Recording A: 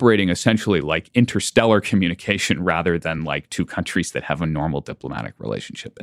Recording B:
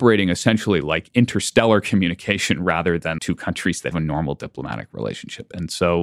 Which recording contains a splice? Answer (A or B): B